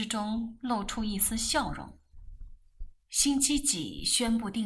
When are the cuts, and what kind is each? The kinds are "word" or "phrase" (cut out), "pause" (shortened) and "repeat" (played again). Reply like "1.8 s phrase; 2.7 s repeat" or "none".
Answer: 3.0 s pause

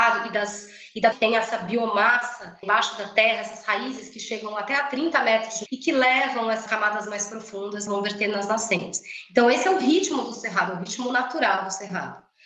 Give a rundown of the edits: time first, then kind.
1.1 s phrase; 2.6 s word; 5.7 s word; 6.7 s phrase; 7.9 s phrase

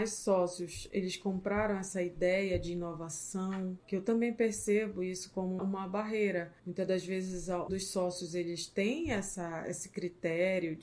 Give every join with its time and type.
3.8 s pause; 5.6 s word; 6.6 s pause; 7.7 s word

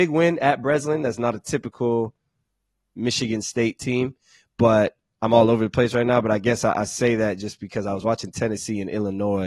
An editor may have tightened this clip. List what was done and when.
none

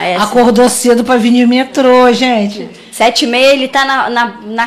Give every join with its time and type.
none

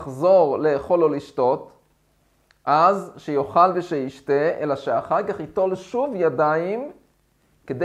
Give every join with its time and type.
none

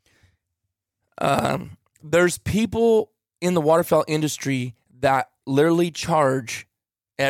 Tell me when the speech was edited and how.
none

